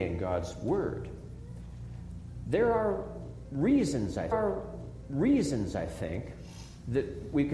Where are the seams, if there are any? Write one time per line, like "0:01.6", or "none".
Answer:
0:04.3